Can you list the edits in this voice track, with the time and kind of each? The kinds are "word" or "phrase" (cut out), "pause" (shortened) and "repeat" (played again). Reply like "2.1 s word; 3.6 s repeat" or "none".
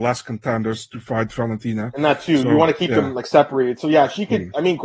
none